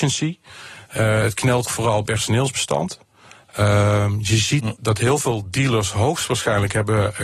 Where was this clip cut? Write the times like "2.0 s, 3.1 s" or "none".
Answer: 1.7 s, 2.1 s, 4.8 s